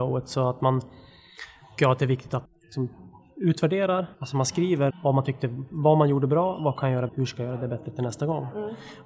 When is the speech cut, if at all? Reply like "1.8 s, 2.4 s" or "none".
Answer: 1.8 s, 2.4 s, 4.1 s, 4.9 s, 7.1 s